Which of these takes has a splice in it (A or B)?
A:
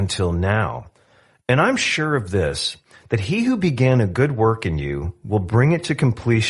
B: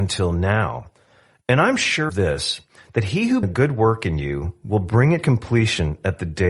B